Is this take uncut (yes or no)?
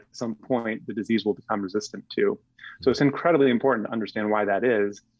yes